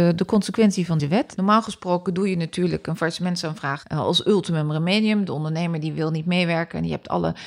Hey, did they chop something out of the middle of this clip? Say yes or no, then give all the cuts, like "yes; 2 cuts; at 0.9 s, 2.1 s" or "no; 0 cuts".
yes; 1 cut; at 1.0 s